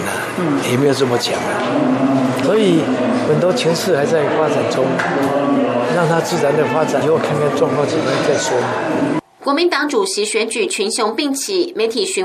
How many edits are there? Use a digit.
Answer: 2